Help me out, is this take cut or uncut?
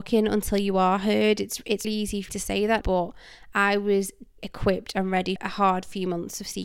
cut